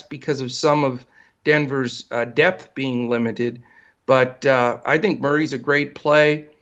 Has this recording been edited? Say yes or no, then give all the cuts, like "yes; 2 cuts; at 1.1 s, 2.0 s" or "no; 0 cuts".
no; 0 cuts